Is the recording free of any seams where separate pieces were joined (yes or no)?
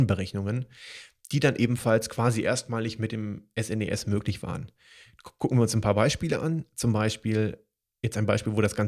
yes